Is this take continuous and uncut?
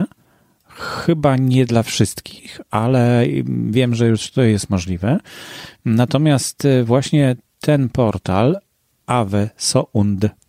yes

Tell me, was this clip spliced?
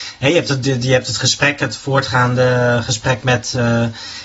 no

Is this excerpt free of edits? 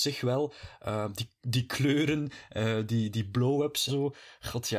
no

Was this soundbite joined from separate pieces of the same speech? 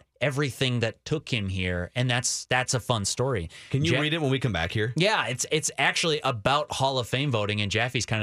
no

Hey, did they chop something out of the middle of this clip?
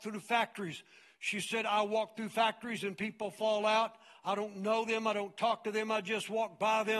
no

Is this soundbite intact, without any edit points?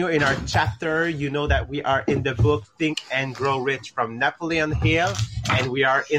yes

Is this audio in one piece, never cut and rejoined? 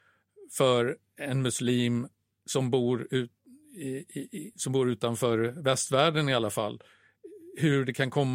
yes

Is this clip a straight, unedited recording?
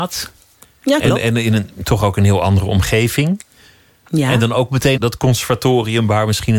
no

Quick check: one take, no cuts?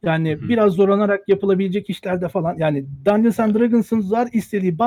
yes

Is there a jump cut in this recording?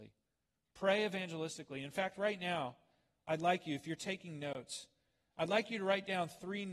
no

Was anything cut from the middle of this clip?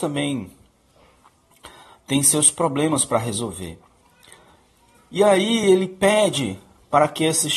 no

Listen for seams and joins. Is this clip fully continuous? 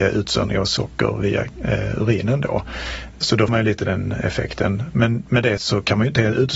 no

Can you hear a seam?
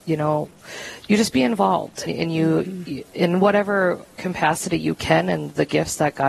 yes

